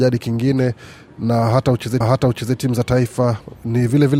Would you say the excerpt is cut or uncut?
cut